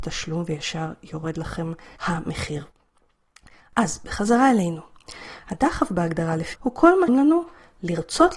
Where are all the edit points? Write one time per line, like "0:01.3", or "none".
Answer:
0:06.5
0:07.1